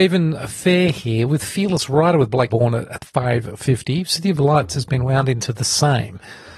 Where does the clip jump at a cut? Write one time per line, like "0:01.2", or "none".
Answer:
0:02.5
0:05.4